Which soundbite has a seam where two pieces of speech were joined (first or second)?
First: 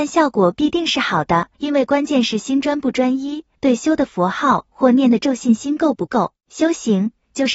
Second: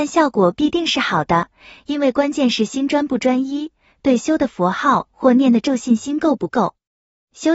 first